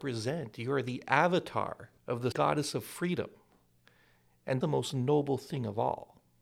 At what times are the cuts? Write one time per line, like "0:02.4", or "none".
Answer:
0:02.0
0:02.3
0:04.6